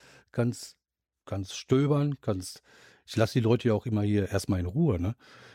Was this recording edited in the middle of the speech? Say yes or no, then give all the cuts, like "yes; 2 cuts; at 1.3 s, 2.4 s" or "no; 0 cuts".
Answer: no; 0 cuts